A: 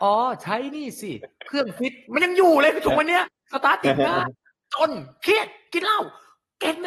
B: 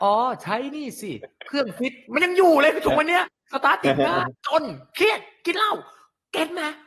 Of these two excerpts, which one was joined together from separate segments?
B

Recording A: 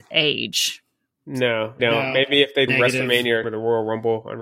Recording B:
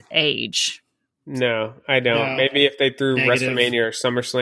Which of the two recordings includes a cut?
A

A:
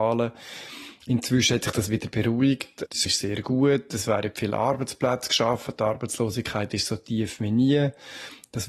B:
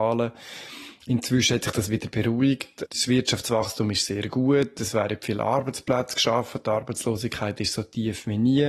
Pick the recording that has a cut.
A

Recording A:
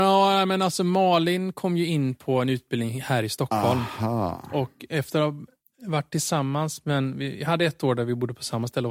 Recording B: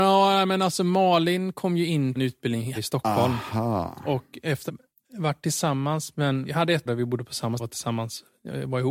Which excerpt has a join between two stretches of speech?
B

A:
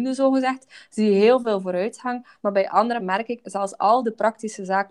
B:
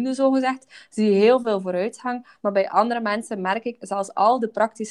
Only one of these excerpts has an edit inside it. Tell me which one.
A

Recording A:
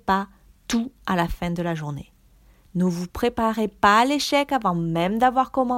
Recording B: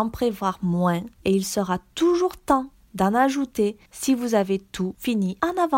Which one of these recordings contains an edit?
B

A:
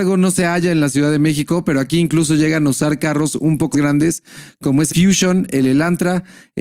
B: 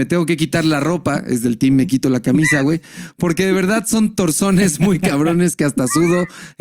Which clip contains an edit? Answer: A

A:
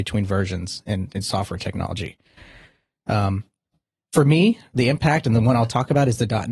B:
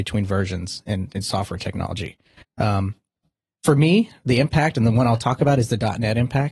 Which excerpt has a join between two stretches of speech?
B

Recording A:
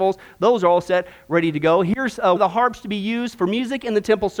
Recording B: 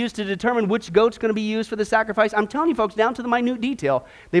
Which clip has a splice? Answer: A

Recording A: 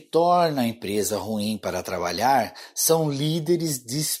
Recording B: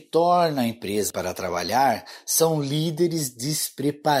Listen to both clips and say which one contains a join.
B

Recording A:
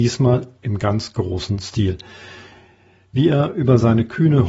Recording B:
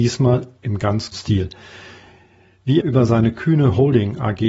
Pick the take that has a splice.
B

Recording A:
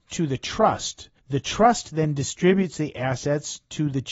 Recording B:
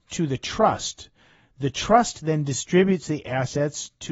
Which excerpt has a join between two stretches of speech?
A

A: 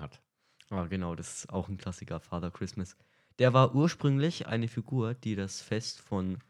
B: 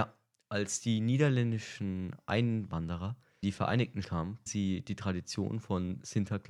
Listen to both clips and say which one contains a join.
B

